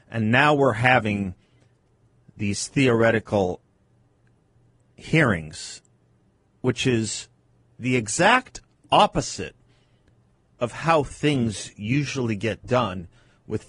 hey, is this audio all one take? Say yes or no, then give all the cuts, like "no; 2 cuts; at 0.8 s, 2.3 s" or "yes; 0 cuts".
yes; 0 cuts